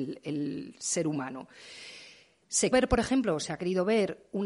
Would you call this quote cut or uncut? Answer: cut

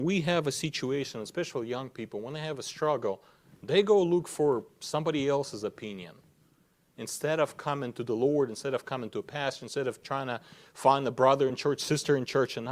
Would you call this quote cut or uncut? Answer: uncut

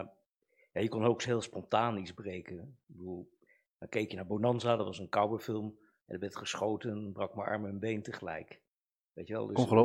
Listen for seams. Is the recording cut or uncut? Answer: uncut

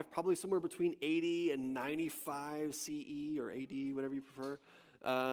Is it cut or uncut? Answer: uncut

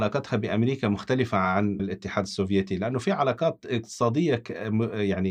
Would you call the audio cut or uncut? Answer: cut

